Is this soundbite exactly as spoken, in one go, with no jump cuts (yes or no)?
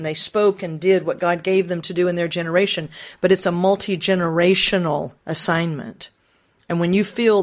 no